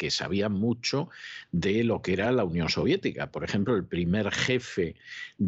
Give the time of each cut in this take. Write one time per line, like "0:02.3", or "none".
none